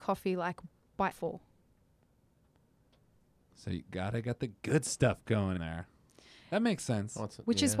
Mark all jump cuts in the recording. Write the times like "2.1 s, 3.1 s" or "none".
1.1 s, 5.6 s